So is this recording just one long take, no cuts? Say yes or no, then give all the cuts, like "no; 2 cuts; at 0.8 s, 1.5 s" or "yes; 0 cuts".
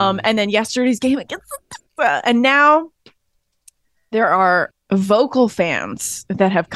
no; 2 cuts; at 1.9 s, 4.7 s